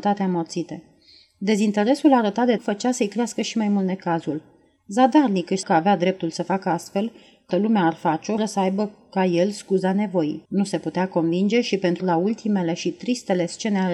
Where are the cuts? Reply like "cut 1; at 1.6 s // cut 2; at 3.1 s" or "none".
cut 1; at 2.6 s // cut 2; at 5.6 s // cut 3; at 7.5 s // cut 4; at 8.4 s // cut 5; at 10.5 s // cut 6; at 12.0 s

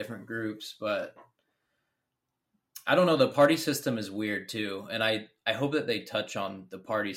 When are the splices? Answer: none

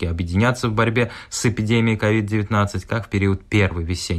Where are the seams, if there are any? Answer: none

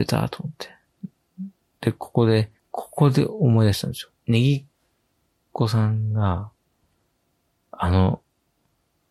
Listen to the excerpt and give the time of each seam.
cut 1; at 2.6 s // cut 2; at 4.2 s

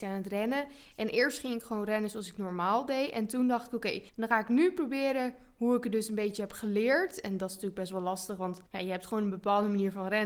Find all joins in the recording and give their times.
cut 1; at 4.1 s // cut 2; at 8.7 s

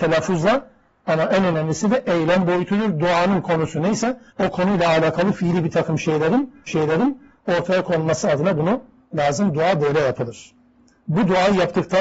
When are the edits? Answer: cut 1; at 4.3 s // cut 2; at 6.7 s // cut 3; at 9.1 s

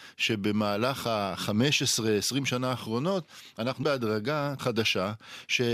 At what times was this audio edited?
cut 1; at 3.8 s // cut 2; at 4.6 s

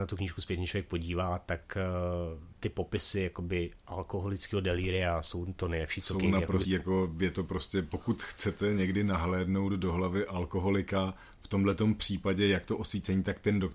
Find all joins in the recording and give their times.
cut 1; at 6.6 s

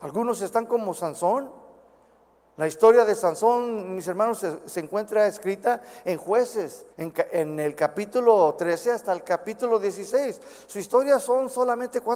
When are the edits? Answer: cut 1; at 6.9 s

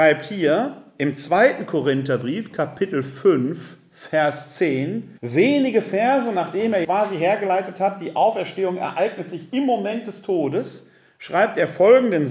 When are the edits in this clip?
cut 1; at 5.2 s // cut 2; at 6.8 s

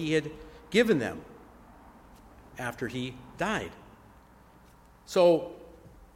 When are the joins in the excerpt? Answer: none

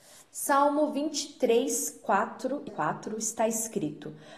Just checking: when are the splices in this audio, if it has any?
cut 1; at 2.7 s

